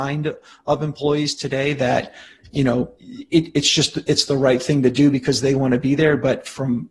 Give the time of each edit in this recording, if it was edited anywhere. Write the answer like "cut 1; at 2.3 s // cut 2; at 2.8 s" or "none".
cut 1; at 3.0 s